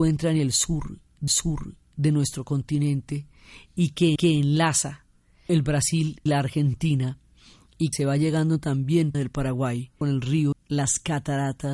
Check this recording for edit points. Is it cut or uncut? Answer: cut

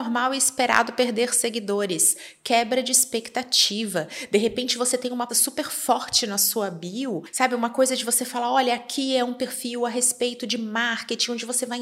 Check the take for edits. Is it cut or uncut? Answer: cut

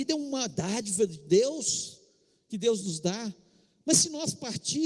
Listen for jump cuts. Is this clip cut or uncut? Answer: uncut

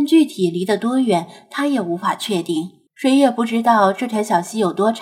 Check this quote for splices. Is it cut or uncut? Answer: cut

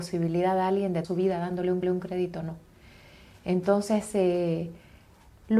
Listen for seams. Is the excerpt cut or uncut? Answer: cut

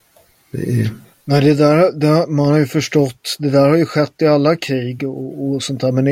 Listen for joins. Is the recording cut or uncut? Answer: uncut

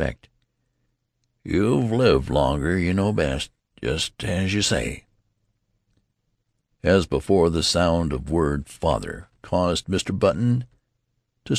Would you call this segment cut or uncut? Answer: uncut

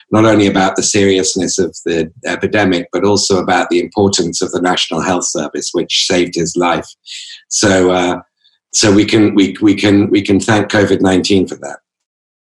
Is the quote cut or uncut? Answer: uncut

